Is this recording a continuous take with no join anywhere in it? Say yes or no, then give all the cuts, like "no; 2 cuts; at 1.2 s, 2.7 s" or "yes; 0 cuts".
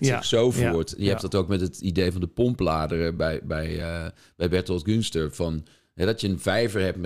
yes; 0 cuts